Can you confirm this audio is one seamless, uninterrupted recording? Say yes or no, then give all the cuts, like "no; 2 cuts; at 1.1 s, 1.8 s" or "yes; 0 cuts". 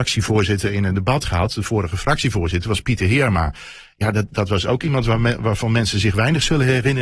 yes; 0 cuts